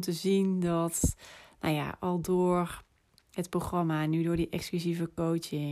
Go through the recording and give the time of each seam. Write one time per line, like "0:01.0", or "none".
none